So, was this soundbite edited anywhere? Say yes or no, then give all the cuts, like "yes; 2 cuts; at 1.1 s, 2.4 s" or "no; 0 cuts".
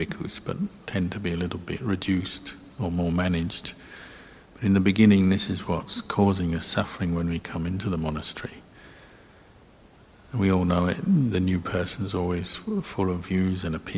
no; 0 cuts